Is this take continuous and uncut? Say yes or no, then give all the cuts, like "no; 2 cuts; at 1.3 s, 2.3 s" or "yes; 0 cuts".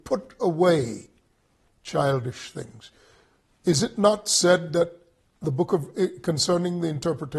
yes; 0 cuts